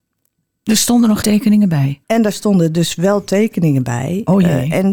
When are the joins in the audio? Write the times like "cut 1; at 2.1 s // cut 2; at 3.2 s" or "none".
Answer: cut 1; at 1.2 s // cut 2; at 2.0 s